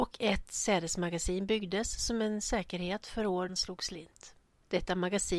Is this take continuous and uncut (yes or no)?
no